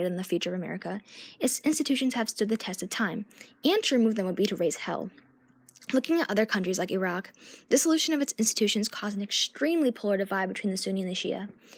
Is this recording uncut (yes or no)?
yes